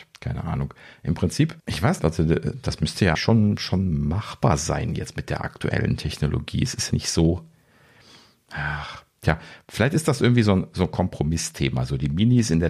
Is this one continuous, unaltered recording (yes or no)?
no